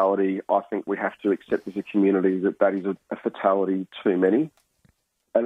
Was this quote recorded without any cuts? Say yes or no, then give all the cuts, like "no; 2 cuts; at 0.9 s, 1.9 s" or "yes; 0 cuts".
yes; 0 cuts